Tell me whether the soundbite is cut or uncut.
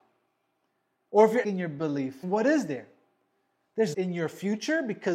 cut